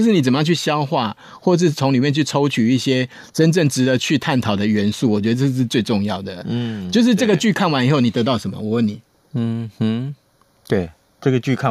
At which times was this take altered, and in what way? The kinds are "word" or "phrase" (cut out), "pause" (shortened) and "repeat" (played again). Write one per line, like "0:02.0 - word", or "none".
none